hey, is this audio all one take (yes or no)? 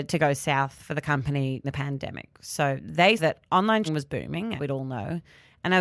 no